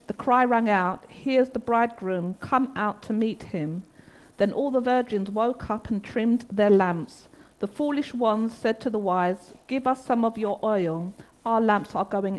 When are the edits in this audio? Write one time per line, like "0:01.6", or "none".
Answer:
none